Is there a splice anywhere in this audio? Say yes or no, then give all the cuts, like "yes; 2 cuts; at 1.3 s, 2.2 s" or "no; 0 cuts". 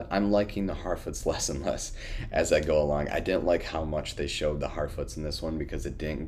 no; 0 cuts